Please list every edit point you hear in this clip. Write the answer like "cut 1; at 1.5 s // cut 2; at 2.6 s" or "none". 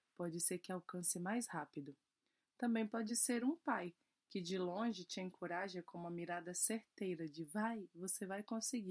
none